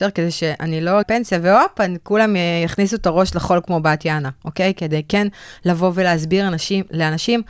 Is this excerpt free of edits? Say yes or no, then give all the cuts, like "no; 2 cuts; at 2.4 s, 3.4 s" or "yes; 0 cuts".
no; 1 cut; at 1.0 s